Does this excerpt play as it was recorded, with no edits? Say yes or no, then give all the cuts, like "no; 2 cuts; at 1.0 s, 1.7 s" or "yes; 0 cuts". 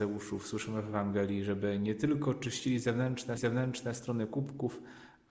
no; 1 cut; at 3.4 s